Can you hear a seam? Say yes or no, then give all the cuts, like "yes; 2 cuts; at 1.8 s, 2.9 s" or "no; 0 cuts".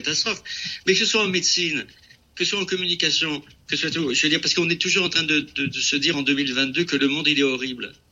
no; 0 cuts